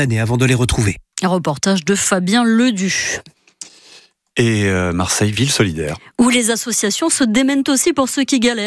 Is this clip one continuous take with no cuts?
yes; 0 cuts

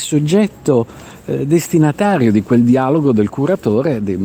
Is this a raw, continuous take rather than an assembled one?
yes; 0 cuts

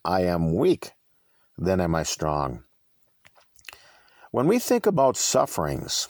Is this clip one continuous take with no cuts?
yes; 0 cuts

